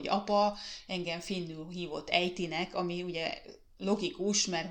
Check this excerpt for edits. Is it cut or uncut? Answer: uncut